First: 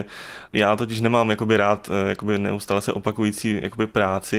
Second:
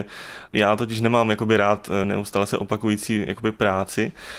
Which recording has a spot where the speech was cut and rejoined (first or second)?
second